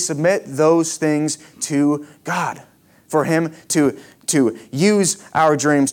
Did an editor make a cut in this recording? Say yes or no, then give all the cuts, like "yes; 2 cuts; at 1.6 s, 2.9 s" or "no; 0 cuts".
no; 0 cuts